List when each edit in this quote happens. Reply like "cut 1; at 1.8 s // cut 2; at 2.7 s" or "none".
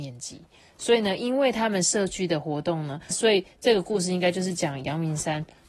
cut 1; at 3.1 s